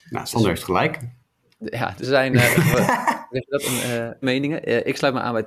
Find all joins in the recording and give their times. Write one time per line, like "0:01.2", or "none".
0:02.0
0:04.2